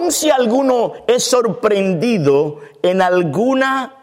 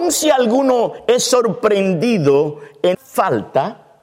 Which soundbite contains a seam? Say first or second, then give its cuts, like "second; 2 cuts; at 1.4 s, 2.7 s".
second; 1 cut; at 2.9 s